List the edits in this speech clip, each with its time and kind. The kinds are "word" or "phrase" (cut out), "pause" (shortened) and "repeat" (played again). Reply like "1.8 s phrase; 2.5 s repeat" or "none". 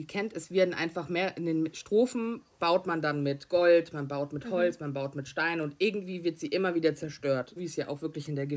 7.6 s word